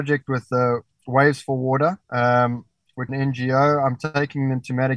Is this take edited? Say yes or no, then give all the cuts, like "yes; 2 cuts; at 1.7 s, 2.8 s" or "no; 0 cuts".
yes; 2 cuts; at 2.0 s, 3.1 s